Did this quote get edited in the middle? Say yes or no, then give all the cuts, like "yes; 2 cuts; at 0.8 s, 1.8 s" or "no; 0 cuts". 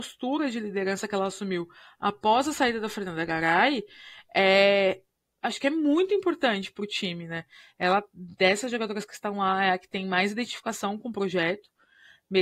no; 0 cuts